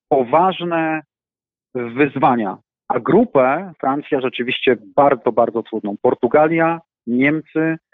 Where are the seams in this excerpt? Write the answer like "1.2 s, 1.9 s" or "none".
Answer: 3.7 s, 5.2 s